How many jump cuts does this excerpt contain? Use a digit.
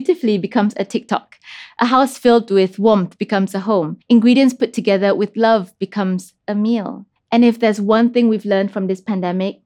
2